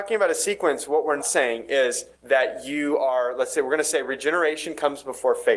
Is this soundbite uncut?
no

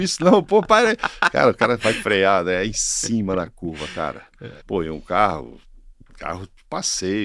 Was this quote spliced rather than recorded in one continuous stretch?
yes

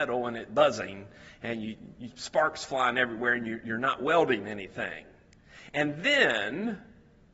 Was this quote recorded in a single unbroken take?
yes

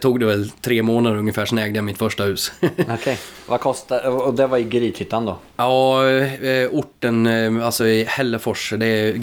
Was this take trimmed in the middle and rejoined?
no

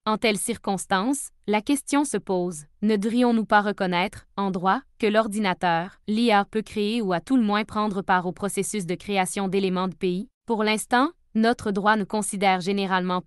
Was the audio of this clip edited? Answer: yes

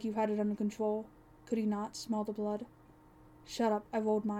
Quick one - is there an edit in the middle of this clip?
no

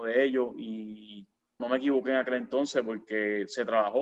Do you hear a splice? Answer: yes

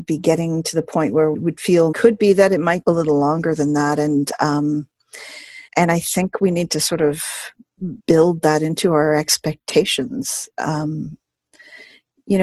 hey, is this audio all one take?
no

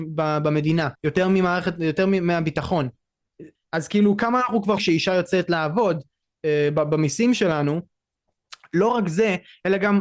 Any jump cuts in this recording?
yes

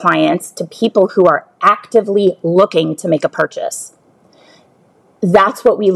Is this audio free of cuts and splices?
yes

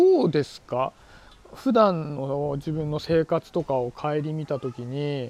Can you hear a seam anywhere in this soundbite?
no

